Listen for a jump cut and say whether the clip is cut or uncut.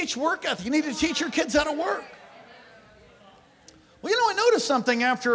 uncut